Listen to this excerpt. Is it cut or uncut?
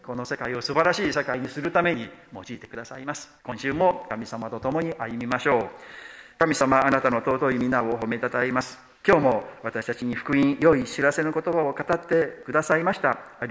cut